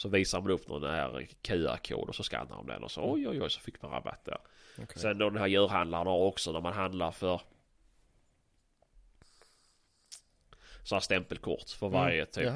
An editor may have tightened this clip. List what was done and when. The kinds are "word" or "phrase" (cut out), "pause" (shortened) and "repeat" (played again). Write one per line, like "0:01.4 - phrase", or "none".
none